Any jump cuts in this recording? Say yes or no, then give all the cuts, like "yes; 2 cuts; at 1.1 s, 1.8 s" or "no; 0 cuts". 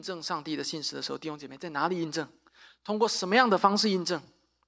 no; 0 cuts